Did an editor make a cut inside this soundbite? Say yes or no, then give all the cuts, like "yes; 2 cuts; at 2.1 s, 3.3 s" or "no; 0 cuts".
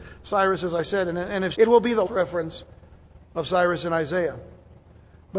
yes; 2 cuts; at 1.5 s, 2.1 s